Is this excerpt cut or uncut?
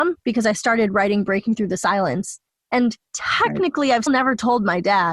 cut